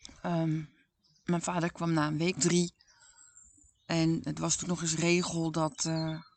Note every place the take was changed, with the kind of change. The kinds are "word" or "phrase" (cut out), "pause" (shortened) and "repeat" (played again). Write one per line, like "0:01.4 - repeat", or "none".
0:02.4 - word
0:04.6 - word